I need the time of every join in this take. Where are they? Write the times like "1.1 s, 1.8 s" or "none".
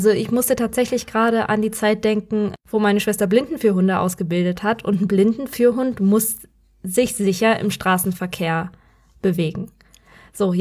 none